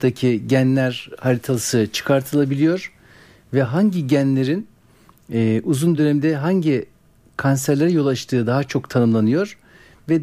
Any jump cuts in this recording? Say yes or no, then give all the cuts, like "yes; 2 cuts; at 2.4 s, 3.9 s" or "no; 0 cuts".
no; 0 cuts